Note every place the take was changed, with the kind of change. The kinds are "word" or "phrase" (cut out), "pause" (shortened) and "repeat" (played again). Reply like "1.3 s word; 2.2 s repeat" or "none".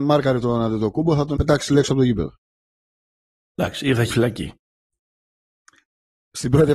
1.4 s word; 4.1 s word